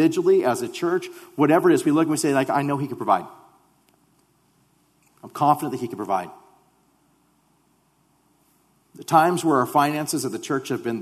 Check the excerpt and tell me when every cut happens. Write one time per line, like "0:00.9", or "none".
none